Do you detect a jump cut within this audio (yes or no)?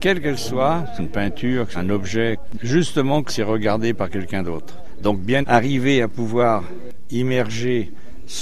yes